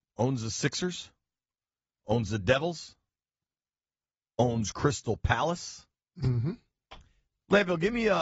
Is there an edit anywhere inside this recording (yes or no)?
no